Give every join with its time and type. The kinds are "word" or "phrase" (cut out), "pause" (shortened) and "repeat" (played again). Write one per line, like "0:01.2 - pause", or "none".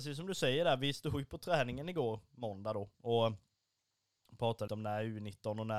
0:04.7 - word